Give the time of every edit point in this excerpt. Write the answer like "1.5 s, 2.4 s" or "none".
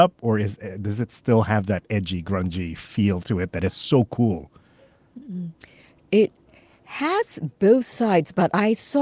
none